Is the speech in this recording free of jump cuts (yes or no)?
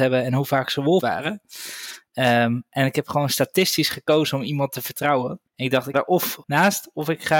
no